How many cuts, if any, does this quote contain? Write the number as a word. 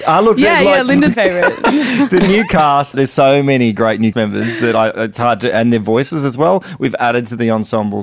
three